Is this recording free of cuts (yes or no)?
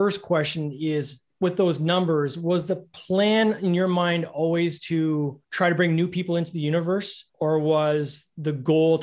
no